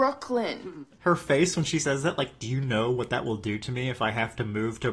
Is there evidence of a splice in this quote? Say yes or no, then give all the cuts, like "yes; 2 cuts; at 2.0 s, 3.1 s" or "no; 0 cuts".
no; 0 cuts